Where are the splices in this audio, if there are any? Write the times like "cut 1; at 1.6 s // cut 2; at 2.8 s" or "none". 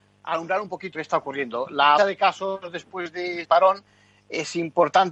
cut 1; at 0.9 s // cut 2; at 2.0 s // cut 3; at 3.4 s